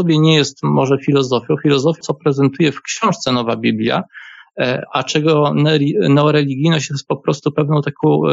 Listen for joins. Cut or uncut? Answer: cut